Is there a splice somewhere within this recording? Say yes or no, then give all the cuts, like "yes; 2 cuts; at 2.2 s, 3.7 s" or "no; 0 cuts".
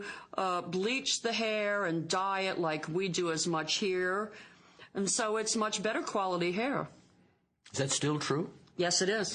no; 0 cuts